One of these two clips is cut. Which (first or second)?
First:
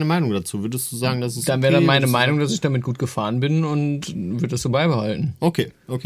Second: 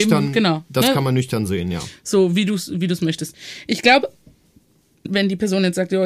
second